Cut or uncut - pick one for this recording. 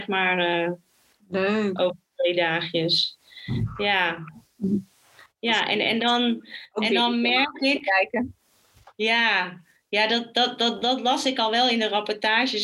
uncut